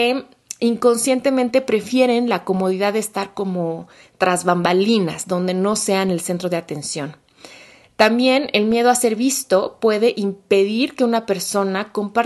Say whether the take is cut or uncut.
uncut